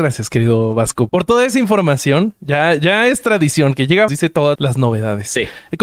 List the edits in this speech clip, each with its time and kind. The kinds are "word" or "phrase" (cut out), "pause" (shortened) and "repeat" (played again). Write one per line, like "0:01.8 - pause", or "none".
0:01.1 - word
0:04.1 - phrase
0:04.5 - word

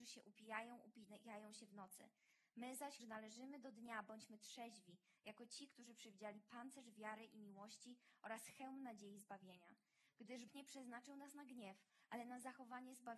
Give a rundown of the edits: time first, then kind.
0:03.0 - word
0:10.5 - word

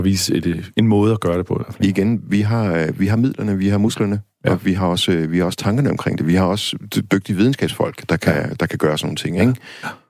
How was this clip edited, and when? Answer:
none

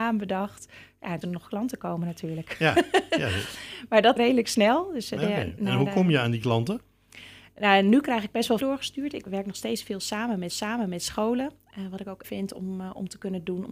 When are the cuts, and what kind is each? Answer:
0:01.2 - phrase
0:04.2 - phrase
0:08.6 - phrase
0:09.3 - word
0:10.5 - repeat
0:12.2 - phrase

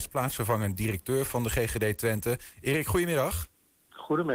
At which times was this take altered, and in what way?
none

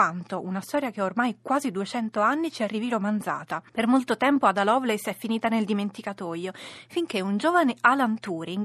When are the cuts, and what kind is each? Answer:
0:03.7 - pause

